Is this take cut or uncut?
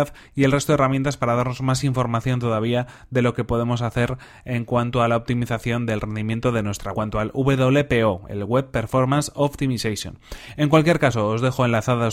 cut